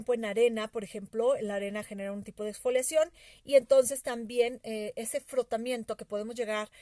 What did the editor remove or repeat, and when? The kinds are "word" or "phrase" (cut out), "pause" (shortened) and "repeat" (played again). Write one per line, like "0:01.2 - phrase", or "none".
none

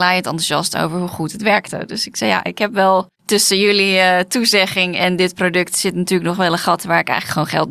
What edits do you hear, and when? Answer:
0:03.2 - pause

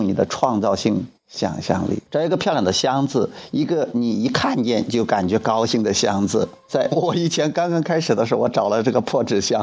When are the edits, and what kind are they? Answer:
0:01.2 - pause
0:02.1 - pause
0:06.6 - pause

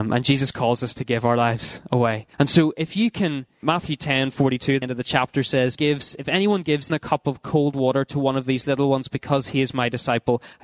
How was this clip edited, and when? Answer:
0:02.3 - pause
0:03.6 - word
0:04.8 - word
0:05.7 - phrase
0:06.9 - word

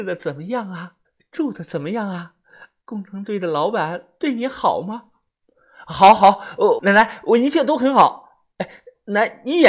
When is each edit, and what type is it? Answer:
0:01.1 - pause
0:06.8 - phrase

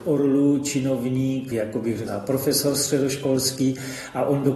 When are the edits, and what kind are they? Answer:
0:01.5 - phrase
0:02.1 - word

